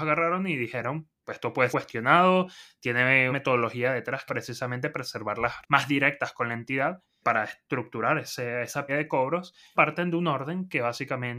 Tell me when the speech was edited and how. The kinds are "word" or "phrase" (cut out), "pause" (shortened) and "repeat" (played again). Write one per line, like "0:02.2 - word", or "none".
0:01.2 - word
0:01.7 - word
0:03.3 - word
0:04.3 - word
0:05.6 - word
0:07.2 - word
0:08.9 - word
0:09.8 - word